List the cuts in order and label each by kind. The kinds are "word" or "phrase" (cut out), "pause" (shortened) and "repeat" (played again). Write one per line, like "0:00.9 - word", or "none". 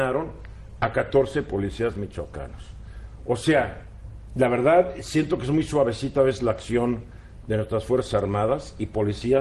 none